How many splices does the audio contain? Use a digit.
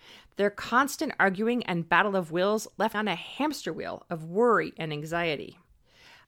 1